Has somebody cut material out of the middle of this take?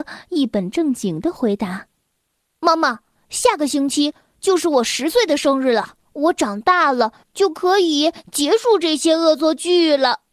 yes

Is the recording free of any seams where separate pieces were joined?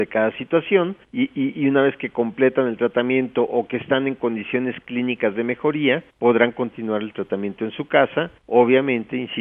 no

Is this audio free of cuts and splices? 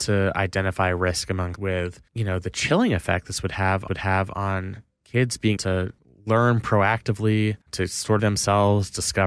no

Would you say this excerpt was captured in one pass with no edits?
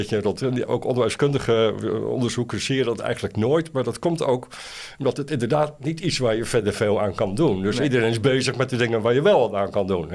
yes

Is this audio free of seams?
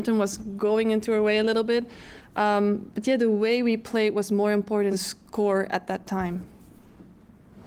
no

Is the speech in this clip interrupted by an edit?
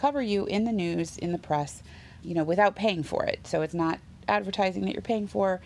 yes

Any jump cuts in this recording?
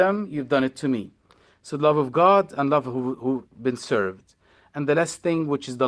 no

